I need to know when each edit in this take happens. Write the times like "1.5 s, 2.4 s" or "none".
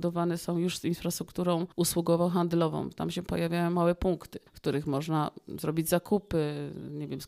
1.7 s, 4.5 s